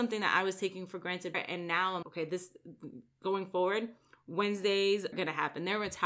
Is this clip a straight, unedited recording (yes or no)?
no